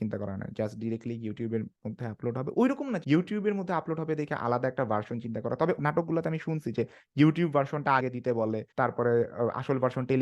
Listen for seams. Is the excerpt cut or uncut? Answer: cut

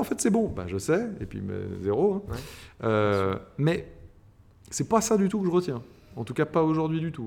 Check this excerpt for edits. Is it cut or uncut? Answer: uncut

